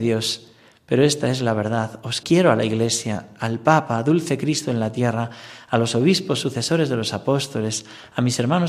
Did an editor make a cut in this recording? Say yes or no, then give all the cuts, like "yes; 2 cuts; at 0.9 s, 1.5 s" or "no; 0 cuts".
yes; 1 cut; at 2.2 s